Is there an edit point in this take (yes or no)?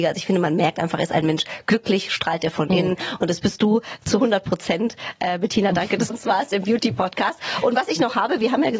yes